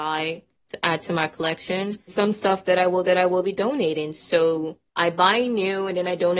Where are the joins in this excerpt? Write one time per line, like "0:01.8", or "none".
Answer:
0:02.1
0:03.0
0:04.9